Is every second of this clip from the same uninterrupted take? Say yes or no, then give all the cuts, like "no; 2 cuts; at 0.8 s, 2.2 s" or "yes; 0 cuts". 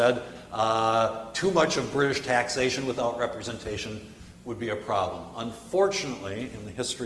yes; 0 cuts